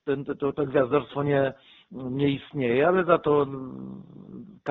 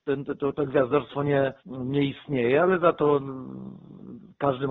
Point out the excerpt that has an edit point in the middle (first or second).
second